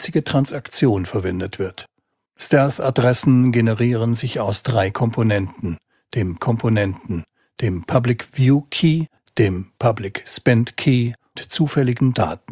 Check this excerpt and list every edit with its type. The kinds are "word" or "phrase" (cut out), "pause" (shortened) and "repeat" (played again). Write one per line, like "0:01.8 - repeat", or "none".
0:06.4 - repeat
0:11.4 - word